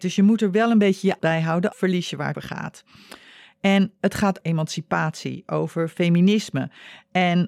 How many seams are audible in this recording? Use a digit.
4